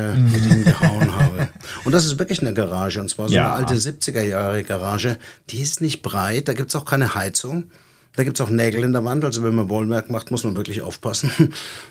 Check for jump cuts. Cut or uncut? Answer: uncut